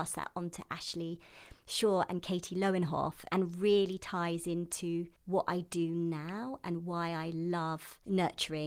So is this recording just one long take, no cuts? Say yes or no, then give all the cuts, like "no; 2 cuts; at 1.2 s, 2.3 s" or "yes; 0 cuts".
no; 1 cut; at 5.2 s